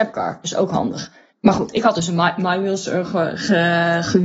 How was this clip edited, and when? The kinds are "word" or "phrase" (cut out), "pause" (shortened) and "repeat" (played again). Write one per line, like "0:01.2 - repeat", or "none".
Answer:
0:01.3 - pause